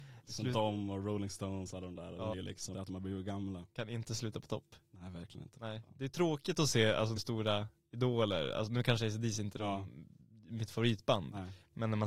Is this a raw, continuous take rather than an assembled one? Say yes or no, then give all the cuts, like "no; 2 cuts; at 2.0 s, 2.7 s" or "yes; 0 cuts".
no; 3 cuts; at 2.3 s, 2.7 s, 7.2 s